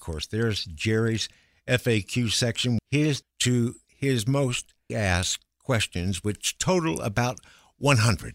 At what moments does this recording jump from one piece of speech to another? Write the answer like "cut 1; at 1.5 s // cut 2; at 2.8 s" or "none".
cut 1; at 2.8 s // cut 2; at 3.2 s // cut 3; at 4.9 s

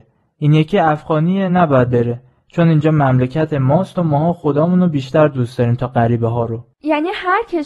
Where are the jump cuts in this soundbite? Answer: none

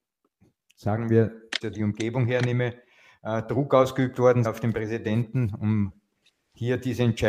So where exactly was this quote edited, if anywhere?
cut 1; at 1.6 s // cut 2; at 4.4 s

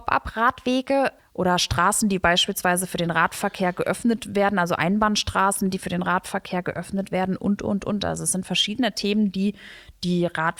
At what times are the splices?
none

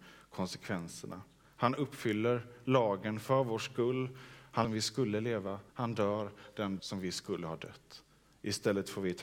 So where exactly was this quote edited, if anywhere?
cut 1; at 4.6 s // cut 2; at 5.7 s // cut 3; at 6.8 s

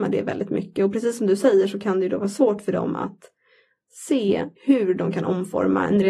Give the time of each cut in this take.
cut 1; at 4.6 s

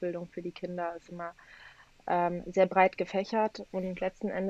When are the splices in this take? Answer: cut 1; at 1.0 s

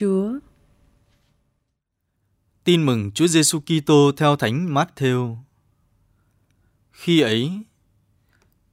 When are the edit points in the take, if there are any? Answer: none

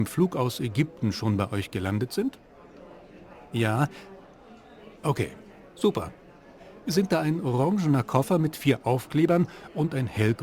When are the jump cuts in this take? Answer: none

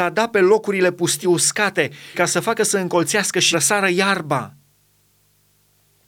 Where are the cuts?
cut 1; at 1.2 s // cut 2; at 2.1 s // cut 3; at 3.5 s

